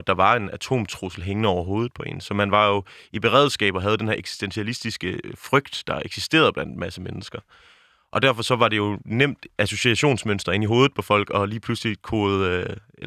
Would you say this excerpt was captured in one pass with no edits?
yes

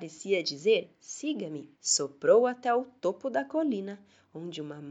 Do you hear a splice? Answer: yes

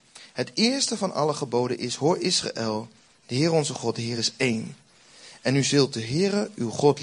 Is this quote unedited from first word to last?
yes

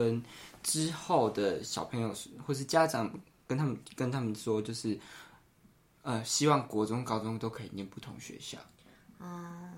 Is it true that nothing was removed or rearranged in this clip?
yes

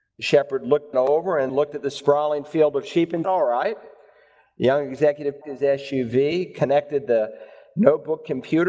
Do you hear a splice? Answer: yes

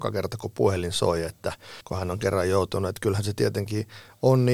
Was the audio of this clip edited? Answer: yes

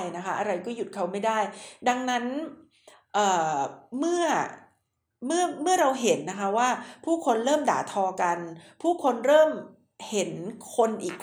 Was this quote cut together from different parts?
no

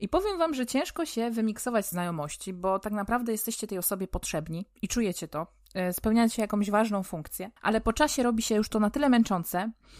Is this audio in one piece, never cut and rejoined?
no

